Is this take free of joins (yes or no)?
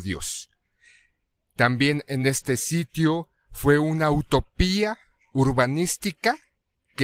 yes